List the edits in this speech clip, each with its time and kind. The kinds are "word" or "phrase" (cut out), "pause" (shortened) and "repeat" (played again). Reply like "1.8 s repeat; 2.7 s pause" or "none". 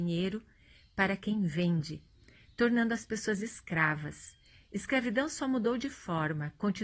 none